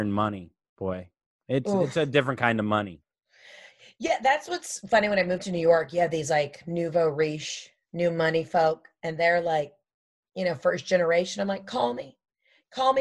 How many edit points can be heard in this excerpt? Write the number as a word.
zero